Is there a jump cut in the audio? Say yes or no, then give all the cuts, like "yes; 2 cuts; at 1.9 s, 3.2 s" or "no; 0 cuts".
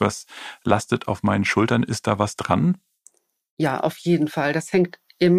no; 0 cuts